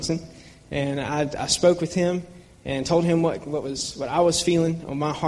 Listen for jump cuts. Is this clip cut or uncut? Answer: uncut